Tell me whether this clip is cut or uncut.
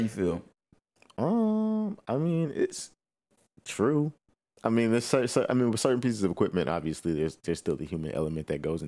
uncut